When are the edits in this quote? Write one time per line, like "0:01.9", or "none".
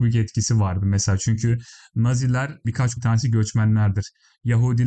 0:02.6
0:03.0

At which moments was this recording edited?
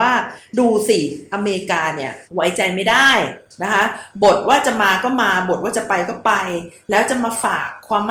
0:02.3

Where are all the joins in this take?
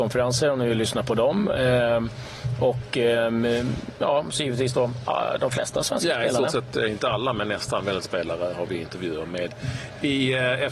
0:08.0

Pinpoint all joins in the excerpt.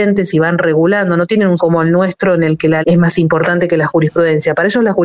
0:01.6
0:02.8

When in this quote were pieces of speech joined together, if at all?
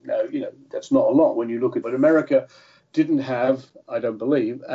0:01.8

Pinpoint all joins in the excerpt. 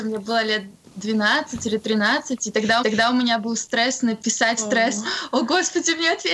0:02.8
0:04.6

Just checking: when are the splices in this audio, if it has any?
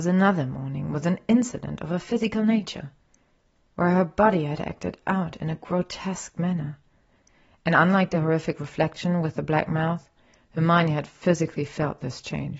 none

